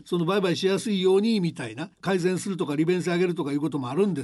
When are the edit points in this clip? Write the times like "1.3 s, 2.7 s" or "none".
1.9 s